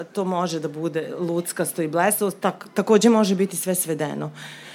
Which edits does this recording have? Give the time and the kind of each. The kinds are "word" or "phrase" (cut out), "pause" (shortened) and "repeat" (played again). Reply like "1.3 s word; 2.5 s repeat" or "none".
none